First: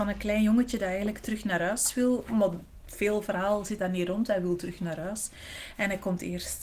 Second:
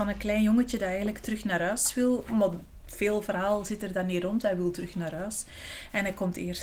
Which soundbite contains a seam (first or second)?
first